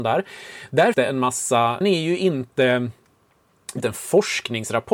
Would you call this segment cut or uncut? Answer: cut